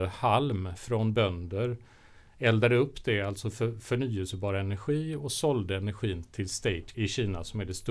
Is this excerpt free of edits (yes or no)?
no